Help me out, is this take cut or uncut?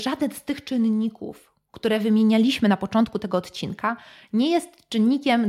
uncut